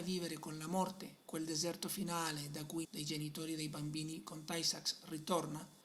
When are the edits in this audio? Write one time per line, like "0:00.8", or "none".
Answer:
0:01.2
0:02.8